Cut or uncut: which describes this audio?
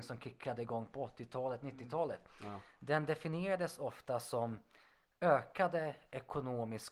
uncut